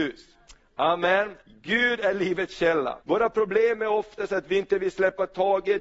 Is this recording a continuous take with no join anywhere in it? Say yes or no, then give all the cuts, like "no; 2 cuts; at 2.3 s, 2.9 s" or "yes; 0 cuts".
no; 2 cuts; at 1.4 s, 3.0 s